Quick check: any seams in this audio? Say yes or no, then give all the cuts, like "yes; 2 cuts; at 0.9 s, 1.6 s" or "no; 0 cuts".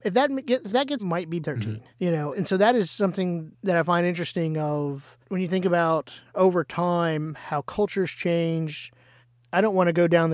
yes; 6 cuts; at 1.0 s, 1.4 s, 1.9 s, 2.3 s, 3.5 s, 5.2 s